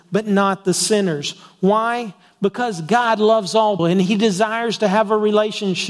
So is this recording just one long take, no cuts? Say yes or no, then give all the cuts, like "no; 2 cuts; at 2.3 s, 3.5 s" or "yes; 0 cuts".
no; 1 cut; at 3.8 s